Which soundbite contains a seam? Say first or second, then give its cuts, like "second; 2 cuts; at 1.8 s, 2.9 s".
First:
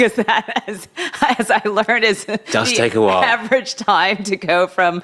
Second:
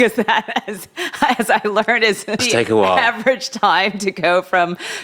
second; 1 cut; at 2.4 s